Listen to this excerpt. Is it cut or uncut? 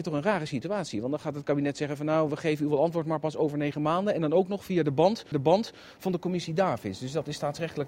cut